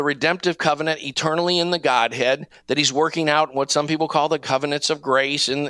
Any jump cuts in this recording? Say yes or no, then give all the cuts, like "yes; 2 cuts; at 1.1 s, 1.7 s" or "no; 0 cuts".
no; 0 cuts